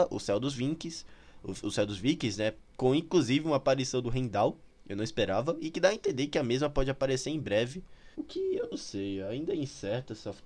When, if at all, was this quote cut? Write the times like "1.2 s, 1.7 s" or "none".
8.1 s